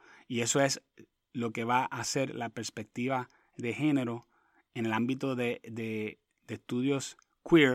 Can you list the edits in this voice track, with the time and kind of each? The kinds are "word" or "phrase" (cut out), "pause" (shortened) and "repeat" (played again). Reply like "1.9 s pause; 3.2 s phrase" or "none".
none